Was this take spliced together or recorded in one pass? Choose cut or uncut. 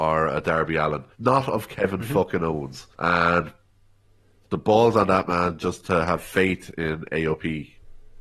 cut